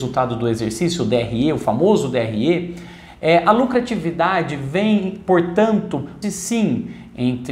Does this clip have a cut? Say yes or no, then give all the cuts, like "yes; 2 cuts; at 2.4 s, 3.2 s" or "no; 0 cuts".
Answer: yes; 1 cut; at 6.2 s